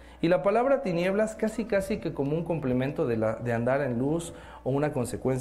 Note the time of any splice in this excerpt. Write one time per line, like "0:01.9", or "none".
none